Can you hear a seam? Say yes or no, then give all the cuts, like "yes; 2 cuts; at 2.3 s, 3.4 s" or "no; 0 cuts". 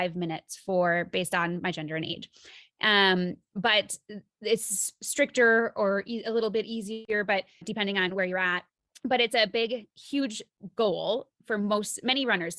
yes; 1 cut; at 7.6 s